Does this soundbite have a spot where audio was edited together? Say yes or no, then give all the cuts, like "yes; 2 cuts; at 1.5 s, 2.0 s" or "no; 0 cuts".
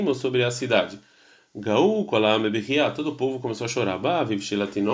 no; 0 cuts